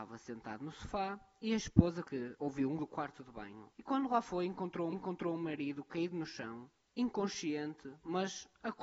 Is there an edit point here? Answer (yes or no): yes